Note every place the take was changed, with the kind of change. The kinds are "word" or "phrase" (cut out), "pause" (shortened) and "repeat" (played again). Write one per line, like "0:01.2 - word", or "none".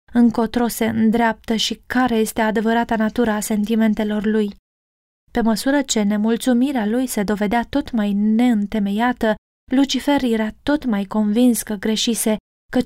none